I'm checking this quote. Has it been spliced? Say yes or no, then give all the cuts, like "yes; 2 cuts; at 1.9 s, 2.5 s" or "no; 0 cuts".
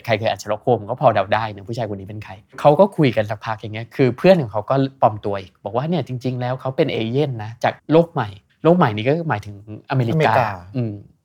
yes; 2 cuts; at 7.8 s, 8.5 s